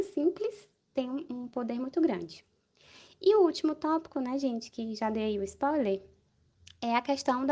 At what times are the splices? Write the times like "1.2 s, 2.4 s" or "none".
none